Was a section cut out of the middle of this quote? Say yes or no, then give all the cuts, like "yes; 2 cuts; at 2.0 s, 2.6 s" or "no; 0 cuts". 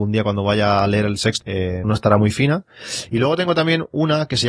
yes; 2 cuts; at 1.4 s, 1.8 s